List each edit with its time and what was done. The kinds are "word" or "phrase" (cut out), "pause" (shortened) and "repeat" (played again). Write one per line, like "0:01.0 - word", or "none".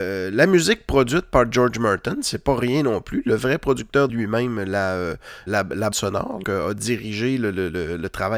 0:04.1 - phrase
0:05.5 - word
0:05.9 - word
0:06.4 - word